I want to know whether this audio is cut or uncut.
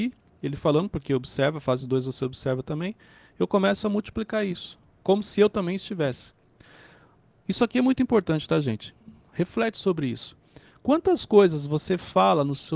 uncut